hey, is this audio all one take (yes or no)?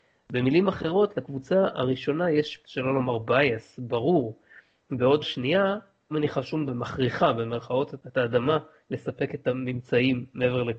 no